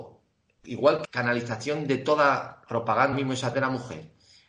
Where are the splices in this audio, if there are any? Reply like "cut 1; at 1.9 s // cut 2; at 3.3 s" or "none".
cut 1; at 1.0 s // cut 2; at 2.7 s // cut 3; at 3.1 s // cut 4; at 3.5 s